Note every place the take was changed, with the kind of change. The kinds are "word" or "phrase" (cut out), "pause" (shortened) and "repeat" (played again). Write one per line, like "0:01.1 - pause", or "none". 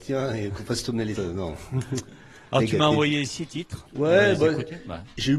0:01.2 - word